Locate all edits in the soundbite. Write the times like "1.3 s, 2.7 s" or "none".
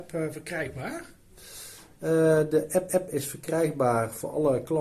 2.9 s